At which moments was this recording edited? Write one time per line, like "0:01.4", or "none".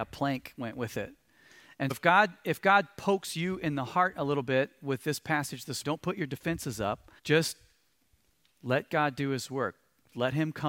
0:01.9
0:05.8
0:07.2